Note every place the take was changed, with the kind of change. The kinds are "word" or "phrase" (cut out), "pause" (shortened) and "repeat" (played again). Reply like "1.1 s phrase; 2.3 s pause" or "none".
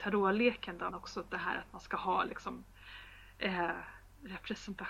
0.9 s word